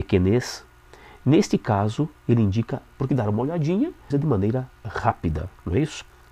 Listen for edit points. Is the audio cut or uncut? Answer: cut